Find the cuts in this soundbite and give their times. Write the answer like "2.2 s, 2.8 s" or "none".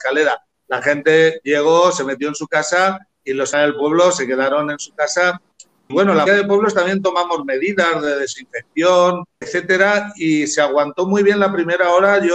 3.5 s, 5.9 s, 6.3 s, 9.4 s